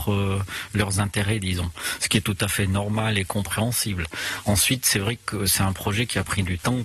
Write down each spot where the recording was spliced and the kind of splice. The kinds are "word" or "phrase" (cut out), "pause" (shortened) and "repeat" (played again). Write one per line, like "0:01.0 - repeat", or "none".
none